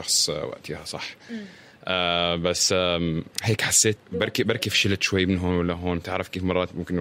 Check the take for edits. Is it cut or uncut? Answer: cut